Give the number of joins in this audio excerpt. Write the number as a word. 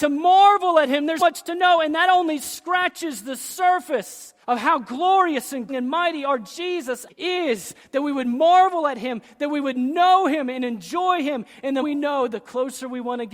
five